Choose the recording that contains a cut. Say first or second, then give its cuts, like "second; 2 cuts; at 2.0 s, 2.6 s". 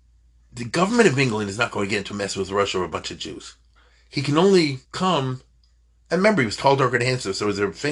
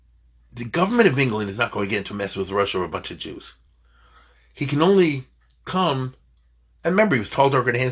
first; 2 cuts; at 3.8 s, 4.8 s